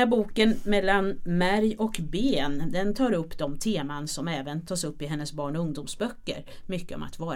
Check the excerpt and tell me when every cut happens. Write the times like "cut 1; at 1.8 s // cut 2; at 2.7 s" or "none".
none

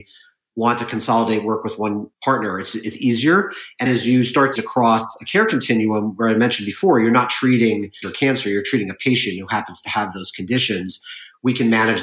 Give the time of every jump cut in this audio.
cut 1; at 2.1 s // cut 2; at 3.9 s // cut 3; at 4.6 s // cut 4; at 8.0 s

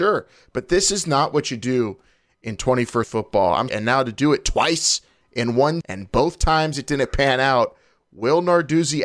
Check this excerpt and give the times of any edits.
cut 1; at 3.0 s // cut 2; at 3.7 s // cut 3; at 5.8 s

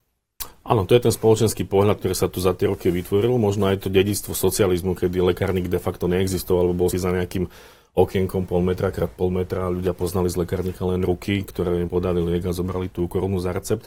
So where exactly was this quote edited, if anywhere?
cut 1; at 6.9 s // cut 2; at 11.9 s // cut 3; at 12.9 s

